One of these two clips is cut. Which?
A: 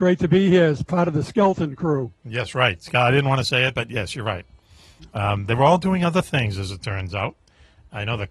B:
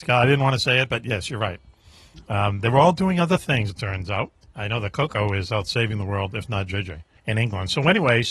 B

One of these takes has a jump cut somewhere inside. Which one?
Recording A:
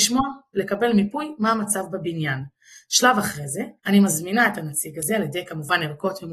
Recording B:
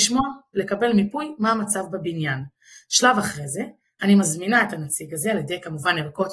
A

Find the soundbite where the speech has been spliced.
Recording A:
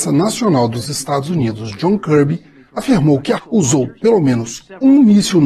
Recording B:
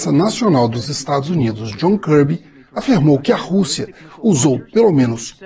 A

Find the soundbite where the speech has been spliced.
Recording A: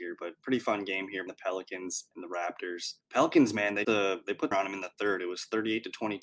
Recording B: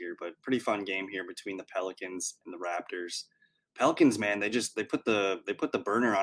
A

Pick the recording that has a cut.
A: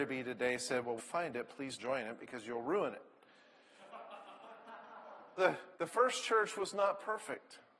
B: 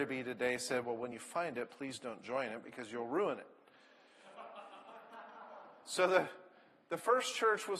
A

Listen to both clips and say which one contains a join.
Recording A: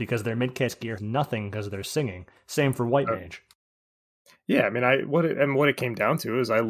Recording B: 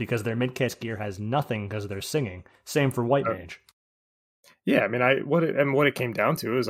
A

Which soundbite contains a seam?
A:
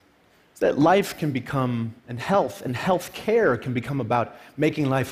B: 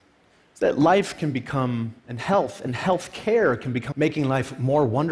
B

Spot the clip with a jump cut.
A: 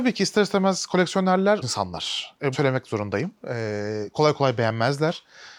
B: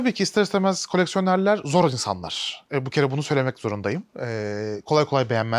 A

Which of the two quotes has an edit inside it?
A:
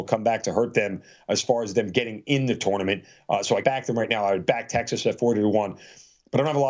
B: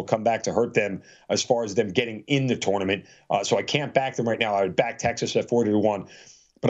A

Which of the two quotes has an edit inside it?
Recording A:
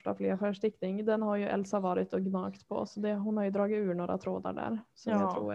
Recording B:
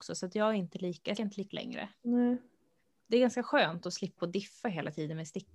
B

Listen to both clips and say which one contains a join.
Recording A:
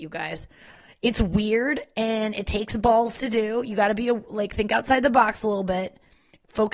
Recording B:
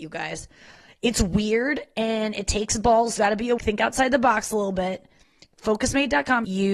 B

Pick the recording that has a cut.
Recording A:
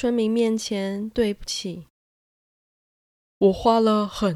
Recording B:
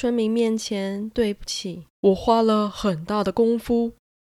B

